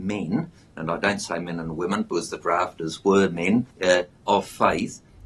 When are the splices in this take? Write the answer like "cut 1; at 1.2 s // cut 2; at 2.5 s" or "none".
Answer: cut 1; at 3.7 s